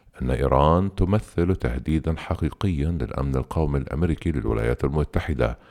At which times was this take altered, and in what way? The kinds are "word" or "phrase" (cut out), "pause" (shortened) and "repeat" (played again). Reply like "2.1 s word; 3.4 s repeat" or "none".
none